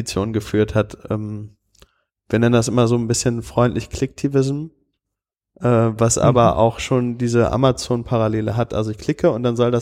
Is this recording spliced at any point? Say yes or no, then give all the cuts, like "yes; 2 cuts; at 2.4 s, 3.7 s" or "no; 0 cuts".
no; 0 cuts